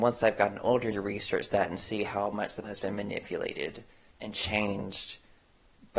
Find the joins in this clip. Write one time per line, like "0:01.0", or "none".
0:00.9
0:02.6
0:04.1